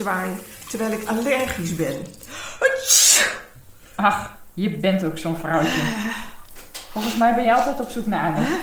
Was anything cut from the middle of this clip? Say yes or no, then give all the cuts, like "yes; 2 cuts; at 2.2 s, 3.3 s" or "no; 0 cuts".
no; 0 cuts